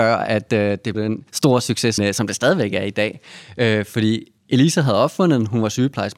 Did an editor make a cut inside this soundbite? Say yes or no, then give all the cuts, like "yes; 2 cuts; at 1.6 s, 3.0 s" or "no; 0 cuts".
yes; 4 cuts; at 0.9 s, 1.3 s, 2.0 s, 4.4 s